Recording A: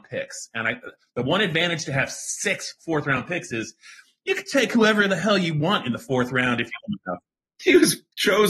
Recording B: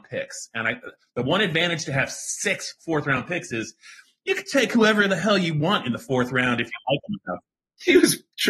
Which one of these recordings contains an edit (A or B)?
A